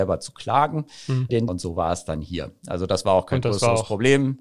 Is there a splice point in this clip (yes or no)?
yes